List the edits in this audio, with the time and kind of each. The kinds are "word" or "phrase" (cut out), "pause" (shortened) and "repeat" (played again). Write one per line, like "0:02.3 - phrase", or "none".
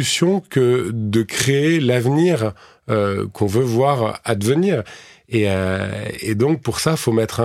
none